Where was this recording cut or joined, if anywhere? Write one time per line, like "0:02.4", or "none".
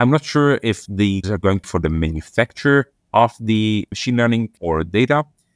0:01.2
0:01.6
0:03.9
0:04.6